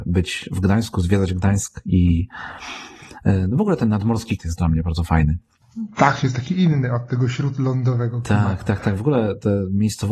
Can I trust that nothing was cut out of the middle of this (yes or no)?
no